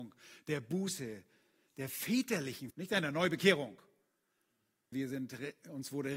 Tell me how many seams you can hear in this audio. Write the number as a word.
two